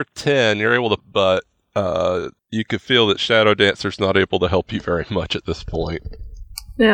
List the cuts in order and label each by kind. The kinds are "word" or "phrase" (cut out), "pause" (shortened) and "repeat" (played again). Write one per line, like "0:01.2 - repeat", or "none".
0:01.0 - phrase
0:02.4 - pause